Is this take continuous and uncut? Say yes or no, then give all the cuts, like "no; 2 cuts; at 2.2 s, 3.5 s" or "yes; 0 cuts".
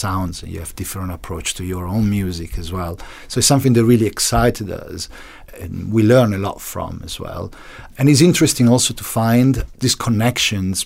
yes; 0 cuts